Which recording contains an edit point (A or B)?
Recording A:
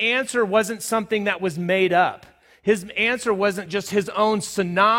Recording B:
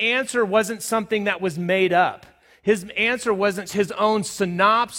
B